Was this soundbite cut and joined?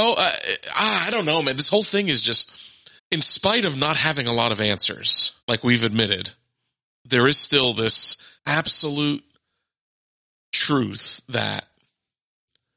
yes; 4 cuts; at 3.0 s, 5.4 s, 6.9 s, 8.4 s

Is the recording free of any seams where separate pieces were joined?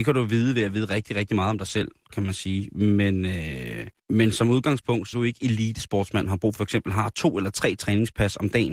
no; 3 cuts; at 4.0 s, 5.1 s, 6.6 s

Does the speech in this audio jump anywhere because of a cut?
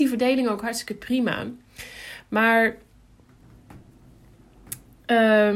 no; 0 cuts

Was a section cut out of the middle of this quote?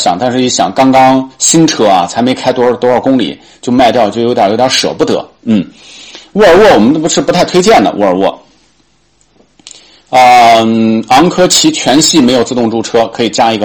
no; 0 cuts

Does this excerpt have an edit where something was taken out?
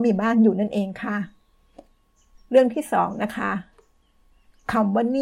no; 0 cuts

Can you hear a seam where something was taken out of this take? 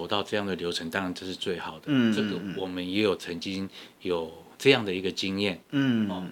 no; 0 cuts

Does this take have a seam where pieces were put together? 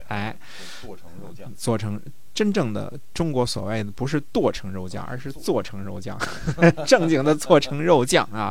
yes; 1 cut; at 1.5 s

